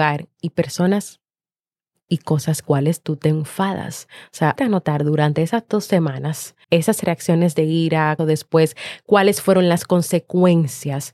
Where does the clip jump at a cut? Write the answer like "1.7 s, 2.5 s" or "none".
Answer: 2.6 s, 4.6 s, 6.6 s, 8.2 s